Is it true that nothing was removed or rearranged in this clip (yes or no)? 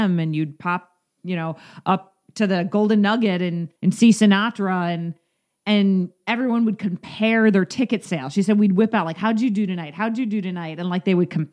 no